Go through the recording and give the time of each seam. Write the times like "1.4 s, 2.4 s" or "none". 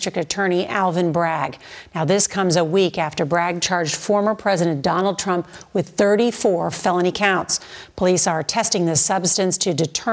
none